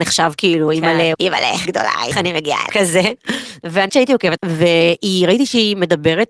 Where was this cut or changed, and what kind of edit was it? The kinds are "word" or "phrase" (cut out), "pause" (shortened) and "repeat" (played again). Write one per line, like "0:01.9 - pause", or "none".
0:01.1 - word
0:01.6 - word
0:02.1 - word
0:02.7 - word
0:03.9 - word
0:04.4 - word